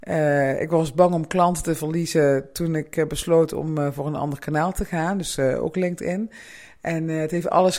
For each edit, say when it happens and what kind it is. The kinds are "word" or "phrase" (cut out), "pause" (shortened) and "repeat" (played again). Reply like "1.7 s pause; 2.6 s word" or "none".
none